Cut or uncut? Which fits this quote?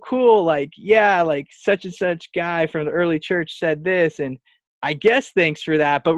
uncut